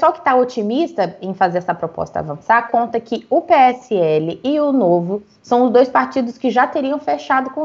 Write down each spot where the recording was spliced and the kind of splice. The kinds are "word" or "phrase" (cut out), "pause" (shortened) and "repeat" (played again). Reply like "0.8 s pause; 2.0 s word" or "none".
none